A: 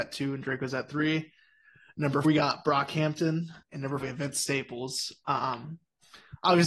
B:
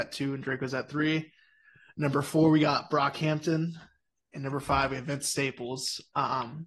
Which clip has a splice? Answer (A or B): A